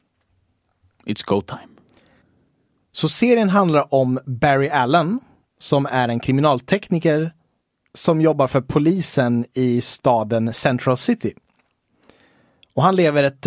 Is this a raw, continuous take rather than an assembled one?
yes; 0 cuts

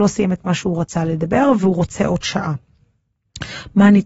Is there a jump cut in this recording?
no; 0 cuts

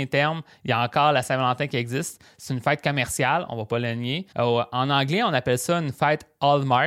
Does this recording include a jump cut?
yes; 1 cut; at 4.3 s

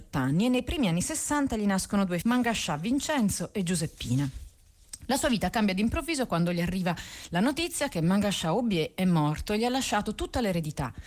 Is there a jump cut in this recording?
yes; 1 cut; at 2.2 s

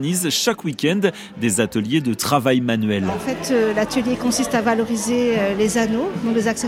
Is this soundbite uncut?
yes; 0 cuts

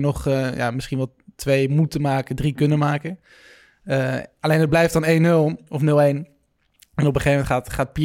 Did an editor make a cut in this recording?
no; 0 cuts

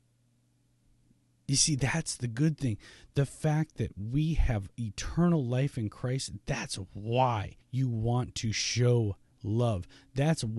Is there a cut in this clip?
yes; 1 cut; at 7.6 s

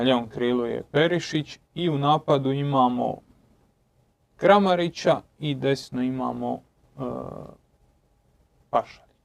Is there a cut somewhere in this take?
no; 0 cuts

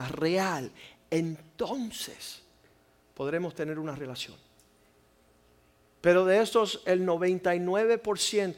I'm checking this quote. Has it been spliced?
no; 0 cuts

